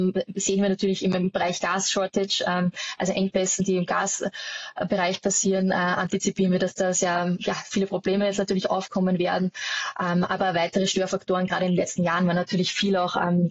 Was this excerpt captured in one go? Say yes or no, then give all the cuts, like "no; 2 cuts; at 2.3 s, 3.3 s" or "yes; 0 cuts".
yes; 0 cuts